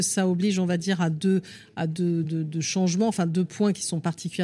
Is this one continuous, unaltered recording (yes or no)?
yes